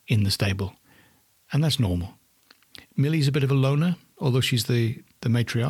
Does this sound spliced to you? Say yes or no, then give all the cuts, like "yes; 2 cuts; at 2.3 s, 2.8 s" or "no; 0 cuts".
no; 0 cuts